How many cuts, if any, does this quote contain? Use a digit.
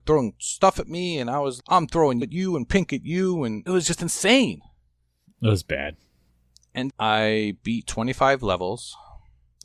4